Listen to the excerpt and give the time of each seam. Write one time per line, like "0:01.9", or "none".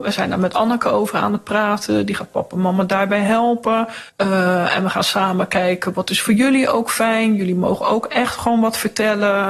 0:04.1